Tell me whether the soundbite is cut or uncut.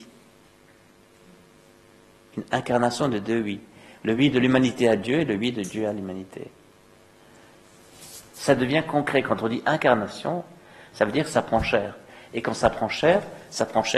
uncut